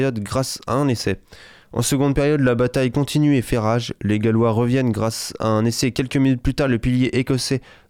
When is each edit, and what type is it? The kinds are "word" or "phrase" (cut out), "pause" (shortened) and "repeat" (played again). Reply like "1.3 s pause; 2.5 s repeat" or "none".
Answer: none